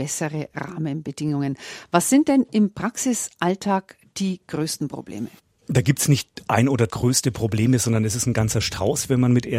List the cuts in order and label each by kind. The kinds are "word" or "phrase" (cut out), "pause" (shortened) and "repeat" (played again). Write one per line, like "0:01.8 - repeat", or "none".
0:06.9 - word